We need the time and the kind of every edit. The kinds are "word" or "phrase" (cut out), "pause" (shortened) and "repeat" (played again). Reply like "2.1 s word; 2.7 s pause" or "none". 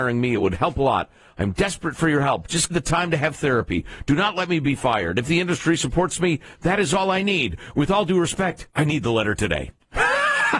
2.7 s phrase; 8.7 s pause